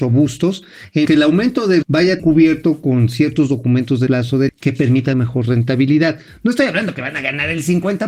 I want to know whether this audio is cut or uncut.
cut